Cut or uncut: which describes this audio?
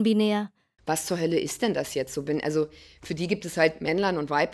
uncut